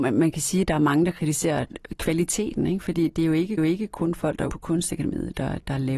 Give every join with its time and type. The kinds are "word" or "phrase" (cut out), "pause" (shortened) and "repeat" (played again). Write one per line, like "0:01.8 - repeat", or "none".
0:03.6 - repeat
0:04.5 - word